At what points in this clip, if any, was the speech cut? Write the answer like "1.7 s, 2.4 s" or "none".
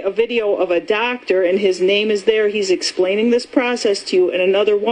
none